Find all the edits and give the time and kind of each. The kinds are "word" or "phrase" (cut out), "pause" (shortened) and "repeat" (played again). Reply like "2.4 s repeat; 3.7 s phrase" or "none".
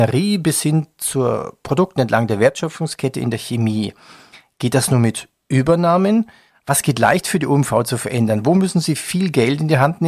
none